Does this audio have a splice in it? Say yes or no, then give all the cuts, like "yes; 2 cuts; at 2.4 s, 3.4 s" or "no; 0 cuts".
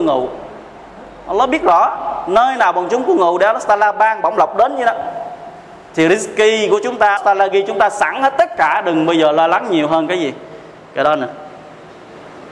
yes; 1 cut; at 7.2 s